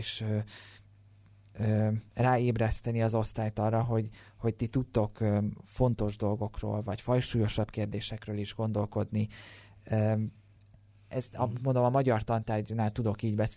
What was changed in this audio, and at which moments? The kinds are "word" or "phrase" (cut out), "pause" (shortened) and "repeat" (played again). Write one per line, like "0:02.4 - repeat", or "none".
none